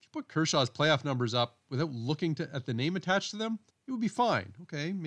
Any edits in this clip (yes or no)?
yes